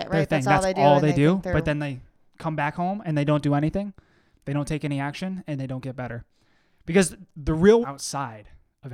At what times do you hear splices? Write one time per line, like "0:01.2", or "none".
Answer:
0:07.8